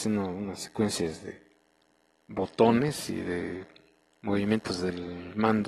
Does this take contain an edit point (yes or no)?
no